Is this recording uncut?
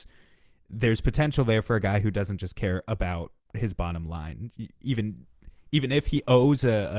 yes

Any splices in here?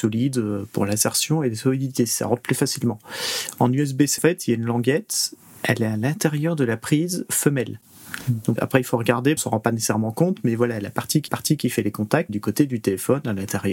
yes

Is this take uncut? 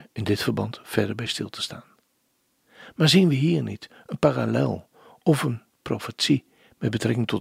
yes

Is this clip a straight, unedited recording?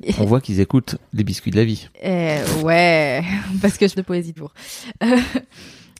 no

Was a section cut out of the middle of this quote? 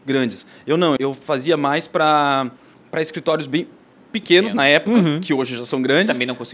yes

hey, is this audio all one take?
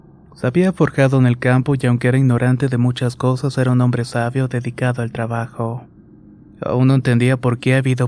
yes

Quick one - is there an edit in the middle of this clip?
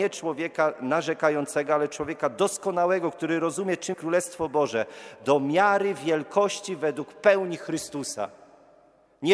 yes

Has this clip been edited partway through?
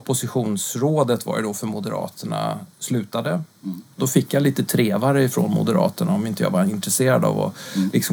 no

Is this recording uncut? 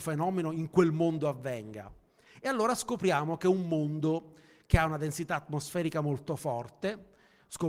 yes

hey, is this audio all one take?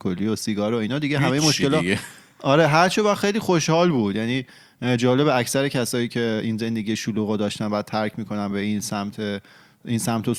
yes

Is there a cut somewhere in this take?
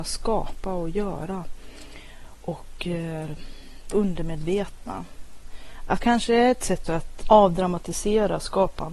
yes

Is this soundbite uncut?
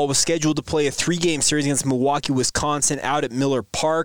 yes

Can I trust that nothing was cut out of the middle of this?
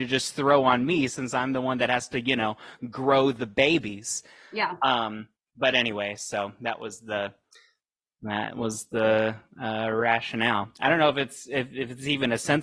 yes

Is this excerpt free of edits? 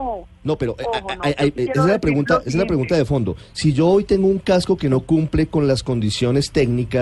yes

